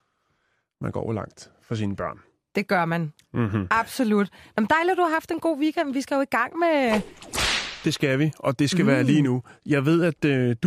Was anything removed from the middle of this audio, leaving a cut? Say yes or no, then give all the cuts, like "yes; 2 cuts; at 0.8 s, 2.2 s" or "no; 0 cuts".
no; 0 cuts